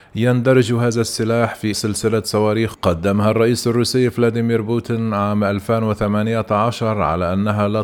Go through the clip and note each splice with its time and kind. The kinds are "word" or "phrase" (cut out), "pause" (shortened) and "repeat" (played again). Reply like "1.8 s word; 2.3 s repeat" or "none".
1.7 s word; 2.7 s word